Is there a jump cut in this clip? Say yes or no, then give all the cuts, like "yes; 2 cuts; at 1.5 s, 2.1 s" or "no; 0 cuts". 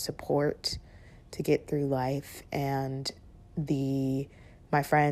no; 0 cuts